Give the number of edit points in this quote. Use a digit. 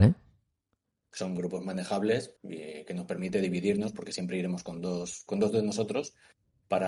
1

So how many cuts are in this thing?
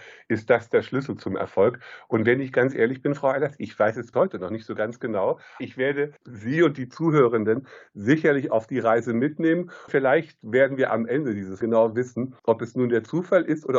7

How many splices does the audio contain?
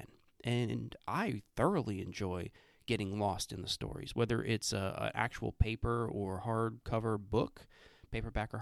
0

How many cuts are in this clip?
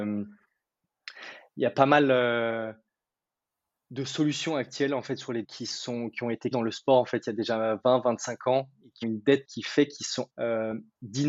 5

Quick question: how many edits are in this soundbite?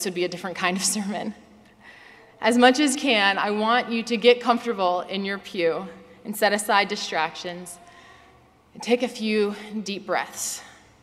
1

